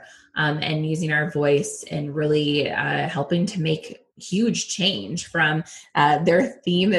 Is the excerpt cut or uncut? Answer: cut